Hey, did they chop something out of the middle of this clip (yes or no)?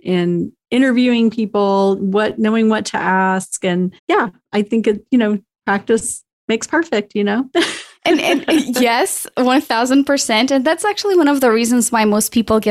yes